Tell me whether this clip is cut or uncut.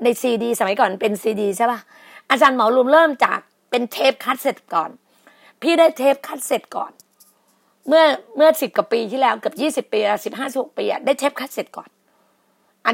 uncut